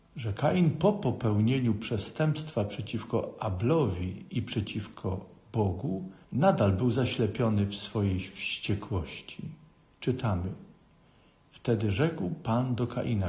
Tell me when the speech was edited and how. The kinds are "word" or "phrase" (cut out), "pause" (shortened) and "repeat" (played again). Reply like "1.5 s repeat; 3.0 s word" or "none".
6.2 s pause